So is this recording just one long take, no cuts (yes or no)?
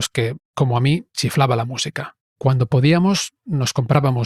no